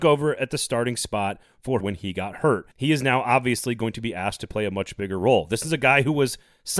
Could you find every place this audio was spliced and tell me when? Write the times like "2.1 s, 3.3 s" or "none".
1.8 s, 2.7 s